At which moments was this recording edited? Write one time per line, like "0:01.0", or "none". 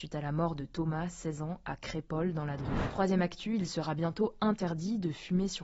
none

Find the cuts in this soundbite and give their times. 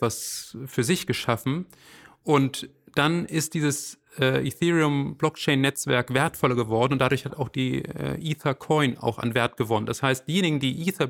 none

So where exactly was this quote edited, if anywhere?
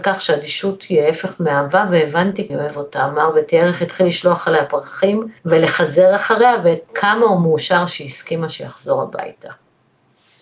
0:02.5
0:05.4

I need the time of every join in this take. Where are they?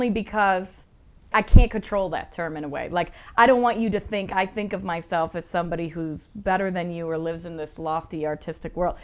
0:01.3

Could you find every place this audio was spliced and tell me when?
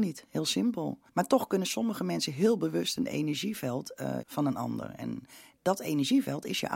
0:01.1
0:04.2

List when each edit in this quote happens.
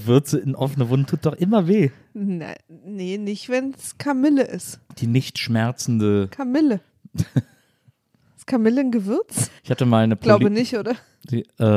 0:04.9
0:09.6

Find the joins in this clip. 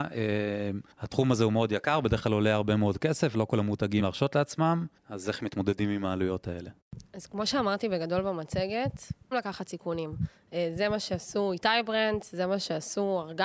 0:00.9
0:04.0
0:05.0
0:09.3

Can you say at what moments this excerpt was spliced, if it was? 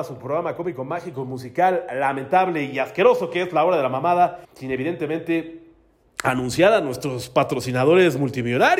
0:04.4

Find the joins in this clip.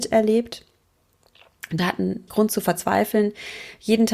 0:01.8
0:02.3

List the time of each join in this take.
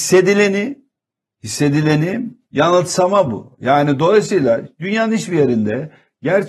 0:01.0

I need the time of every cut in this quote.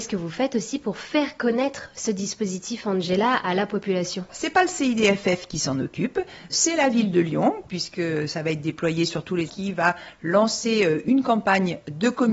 0:04.3
0:09.5

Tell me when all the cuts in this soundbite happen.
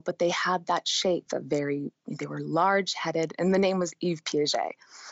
0:01.3

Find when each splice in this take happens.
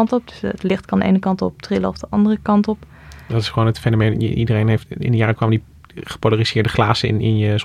0:04.9
0:05.4

